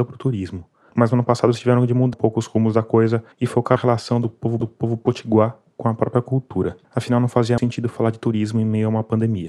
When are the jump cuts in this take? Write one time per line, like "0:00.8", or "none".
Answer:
0:02.1
0:03.3
0:03.8
0:04.6
0:06.8
0:07.6